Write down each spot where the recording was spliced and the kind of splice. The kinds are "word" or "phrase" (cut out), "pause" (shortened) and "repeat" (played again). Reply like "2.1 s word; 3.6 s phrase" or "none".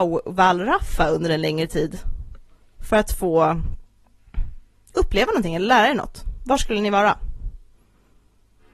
none